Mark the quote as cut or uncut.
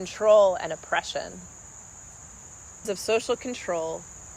cut